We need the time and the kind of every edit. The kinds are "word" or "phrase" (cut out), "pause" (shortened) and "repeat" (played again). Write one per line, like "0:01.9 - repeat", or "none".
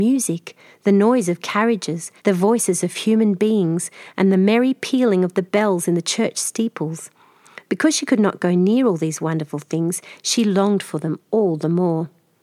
0:02.2 - pause